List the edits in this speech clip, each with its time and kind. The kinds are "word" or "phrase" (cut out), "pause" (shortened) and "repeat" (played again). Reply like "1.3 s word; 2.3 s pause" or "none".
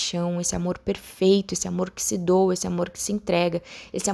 none